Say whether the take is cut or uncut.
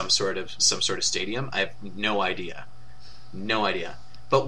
uncut